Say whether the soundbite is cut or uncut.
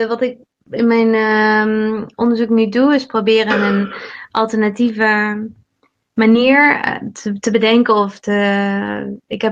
uncut